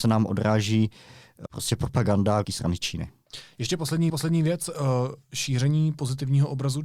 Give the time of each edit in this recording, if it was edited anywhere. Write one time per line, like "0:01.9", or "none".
0:01.5
0:02.4
0:04.1

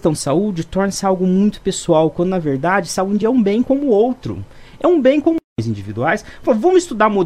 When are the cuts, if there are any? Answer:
none

